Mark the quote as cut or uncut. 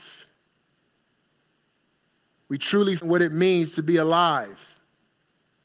cut